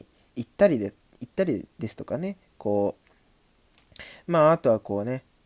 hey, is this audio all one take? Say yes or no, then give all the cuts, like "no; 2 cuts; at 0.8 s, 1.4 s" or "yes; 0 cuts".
yes; 0 cuts